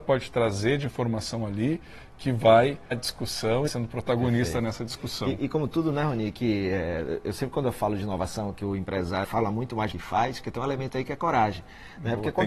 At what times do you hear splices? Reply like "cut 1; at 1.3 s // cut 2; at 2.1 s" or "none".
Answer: cut 1; at 2.9 s // cut 2; at 3.7 s // cut 3; at 9.2 s // cut 4; at 9.9 s